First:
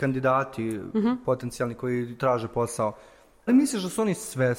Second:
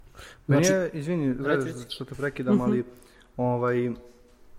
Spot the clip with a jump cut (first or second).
first